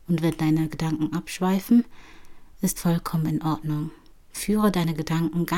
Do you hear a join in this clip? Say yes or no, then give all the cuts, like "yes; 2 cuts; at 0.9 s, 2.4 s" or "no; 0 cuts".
yes; 2 cuts; at 2.8 s, 4.1 s